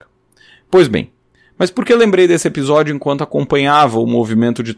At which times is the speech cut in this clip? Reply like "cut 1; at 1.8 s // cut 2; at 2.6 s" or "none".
none